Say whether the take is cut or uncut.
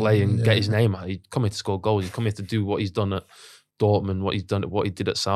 uncut